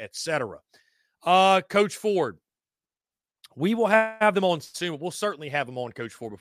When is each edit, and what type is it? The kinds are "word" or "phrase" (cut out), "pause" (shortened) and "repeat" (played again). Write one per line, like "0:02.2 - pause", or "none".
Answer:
none

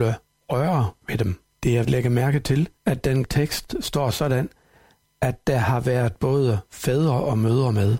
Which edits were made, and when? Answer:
0:01.5 - pause
0:01.8 - phrase
0:02.8 - pause
0:03.2 - word

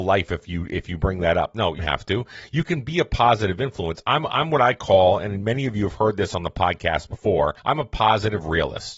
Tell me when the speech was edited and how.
0:01.8 - word
0:07.6 - pause

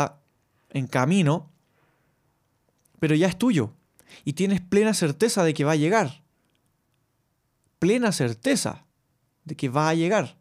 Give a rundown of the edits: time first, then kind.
none

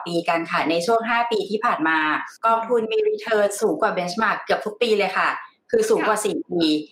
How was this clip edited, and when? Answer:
0:02.4 - pause

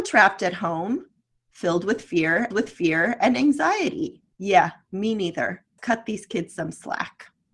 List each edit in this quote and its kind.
0:02.5 - repeat
0:04.3 - pause
0:05.8 - word

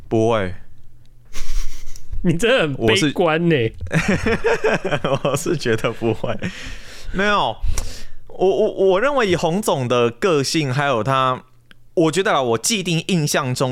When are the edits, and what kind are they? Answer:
none

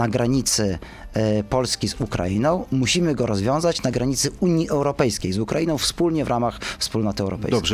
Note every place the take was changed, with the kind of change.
none

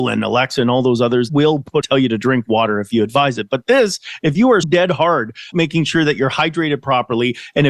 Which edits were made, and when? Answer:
0:01.3 - phrase
0:01.8 - phrase
0:04.6 - word
0:05.5 - word

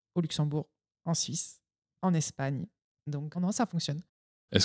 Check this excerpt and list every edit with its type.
0:03.3 - word

